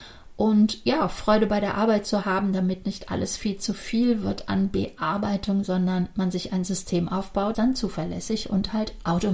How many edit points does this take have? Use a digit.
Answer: 1